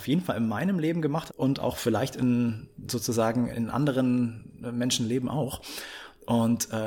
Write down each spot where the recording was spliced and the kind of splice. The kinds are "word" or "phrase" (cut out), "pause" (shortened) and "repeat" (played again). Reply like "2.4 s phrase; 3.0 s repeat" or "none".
1.3 s word; 3.5 s word